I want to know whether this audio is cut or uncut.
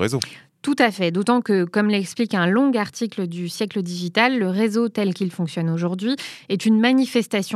uncut